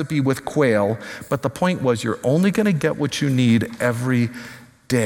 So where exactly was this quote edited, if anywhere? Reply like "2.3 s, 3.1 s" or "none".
none